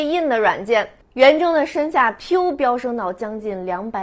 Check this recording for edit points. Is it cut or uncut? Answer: uncut